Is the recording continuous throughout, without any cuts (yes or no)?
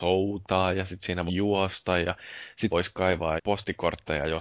no